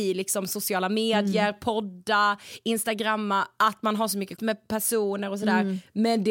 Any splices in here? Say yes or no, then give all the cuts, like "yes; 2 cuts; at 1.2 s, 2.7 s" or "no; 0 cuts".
yes; 1 cut; at 4.4 s